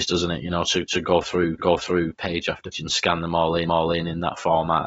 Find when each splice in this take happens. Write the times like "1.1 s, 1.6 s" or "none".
1.6 s, 2.7 s, 3.7 s